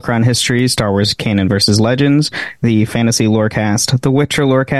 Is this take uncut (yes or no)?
no